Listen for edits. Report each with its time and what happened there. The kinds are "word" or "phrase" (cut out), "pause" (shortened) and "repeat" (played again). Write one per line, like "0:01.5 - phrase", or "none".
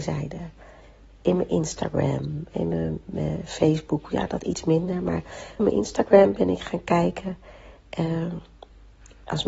0:05.6 - word